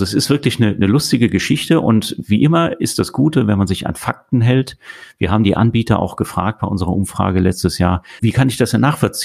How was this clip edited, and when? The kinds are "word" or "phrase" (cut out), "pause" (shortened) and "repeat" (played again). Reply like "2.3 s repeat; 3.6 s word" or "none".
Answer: 8.2 s word